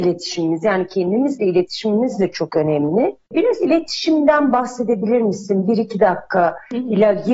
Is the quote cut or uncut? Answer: uncut